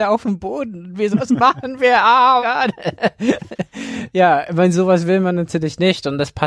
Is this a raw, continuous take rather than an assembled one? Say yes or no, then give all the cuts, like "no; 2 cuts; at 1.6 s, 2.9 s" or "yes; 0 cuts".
no; 2 cuts; at 1.1 s, 2.4 s